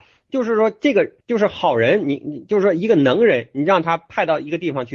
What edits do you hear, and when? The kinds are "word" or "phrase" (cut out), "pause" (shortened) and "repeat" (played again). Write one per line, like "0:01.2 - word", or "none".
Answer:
0:01.2 - pause